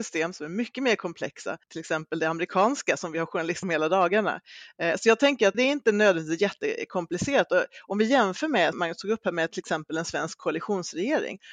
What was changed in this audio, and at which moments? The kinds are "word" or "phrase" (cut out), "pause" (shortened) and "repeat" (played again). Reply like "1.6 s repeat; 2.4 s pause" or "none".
1.6 s pause; 3.6 s phrase; 5.5 s word; 8.7 s word